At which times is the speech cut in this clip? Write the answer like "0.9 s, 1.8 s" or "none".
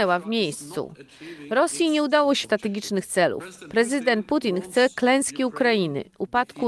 2.4 s